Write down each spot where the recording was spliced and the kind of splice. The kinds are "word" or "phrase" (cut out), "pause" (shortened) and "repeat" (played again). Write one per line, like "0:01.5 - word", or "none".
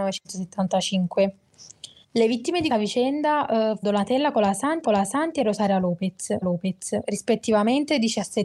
0:02.0 - pause
0:02.7 - word
0:03.8 - word
0:04.8 - repeat
0:06.4 - repeat